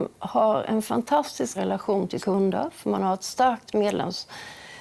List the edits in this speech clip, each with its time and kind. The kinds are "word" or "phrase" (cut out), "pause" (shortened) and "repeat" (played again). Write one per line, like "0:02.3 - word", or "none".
0:01.6 - word
0:02.2 - word